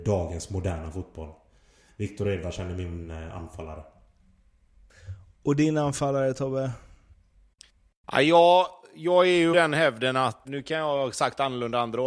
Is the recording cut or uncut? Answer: cut